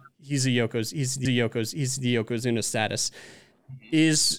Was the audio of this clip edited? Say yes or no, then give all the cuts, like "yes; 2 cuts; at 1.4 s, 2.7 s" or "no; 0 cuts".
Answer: yes; 1 cut; at 1.3 s